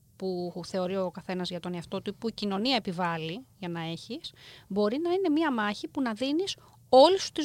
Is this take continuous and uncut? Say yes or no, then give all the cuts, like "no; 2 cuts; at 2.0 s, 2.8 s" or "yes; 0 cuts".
yes; 0 cuts